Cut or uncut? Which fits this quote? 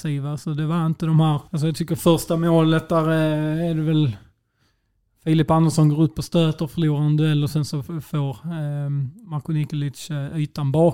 cut